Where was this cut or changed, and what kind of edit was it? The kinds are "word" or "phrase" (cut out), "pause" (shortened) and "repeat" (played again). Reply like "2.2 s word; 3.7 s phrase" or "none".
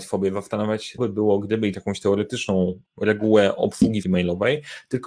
1.0 s word; 1.7 s word; 2.9 s pause; 4.0 s word